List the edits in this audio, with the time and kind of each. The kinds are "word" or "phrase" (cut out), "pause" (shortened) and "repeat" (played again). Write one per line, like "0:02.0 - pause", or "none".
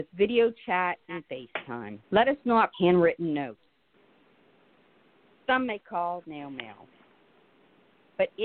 0:02.0 - pause
0:02.7 - word
0:06.2 - word